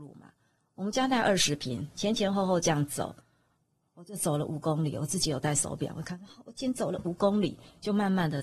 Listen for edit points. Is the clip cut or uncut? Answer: uncut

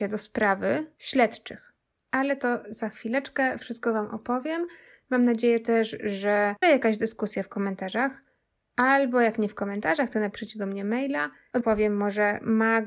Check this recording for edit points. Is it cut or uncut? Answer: cut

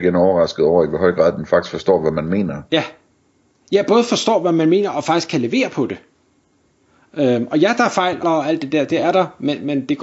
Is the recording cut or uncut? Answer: cut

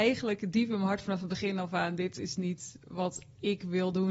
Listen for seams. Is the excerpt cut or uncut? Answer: uncut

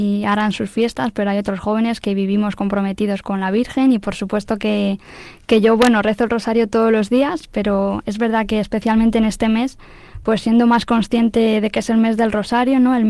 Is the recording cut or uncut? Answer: uncut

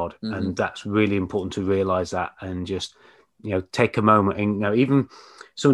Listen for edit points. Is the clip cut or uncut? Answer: uncut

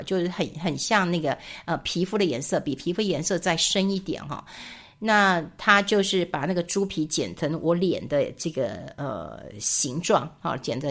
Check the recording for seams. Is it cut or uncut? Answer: uncut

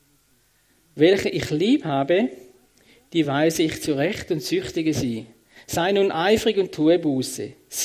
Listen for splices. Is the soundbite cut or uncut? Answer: uncut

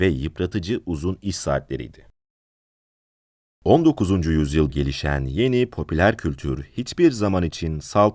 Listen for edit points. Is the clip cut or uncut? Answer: cut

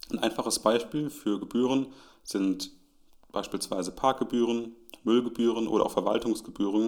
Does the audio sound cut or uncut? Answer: uncut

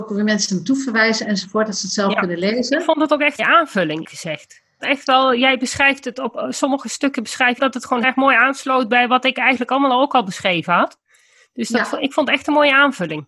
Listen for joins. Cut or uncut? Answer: cut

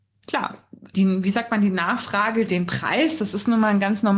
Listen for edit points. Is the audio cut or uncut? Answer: cut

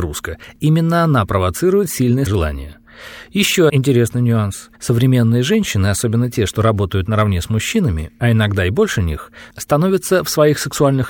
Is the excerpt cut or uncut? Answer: cut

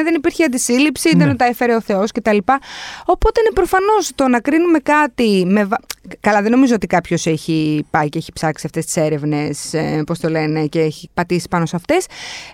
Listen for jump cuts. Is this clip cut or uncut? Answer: uncut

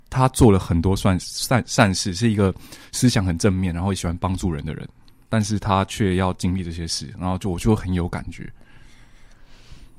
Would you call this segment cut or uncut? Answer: cut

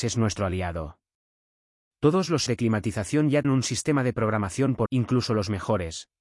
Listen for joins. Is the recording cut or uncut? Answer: cut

